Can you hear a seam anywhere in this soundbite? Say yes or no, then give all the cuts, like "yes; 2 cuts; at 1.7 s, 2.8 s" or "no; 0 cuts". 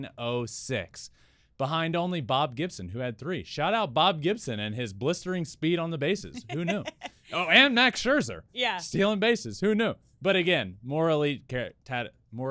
no; 0 cuts